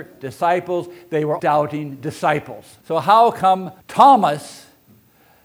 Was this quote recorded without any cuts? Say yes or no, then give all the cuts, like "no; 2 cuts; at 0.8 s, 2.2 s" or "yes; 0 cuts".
no; 3 cuts; at 1.4 s, 2.8 s, 3.8 s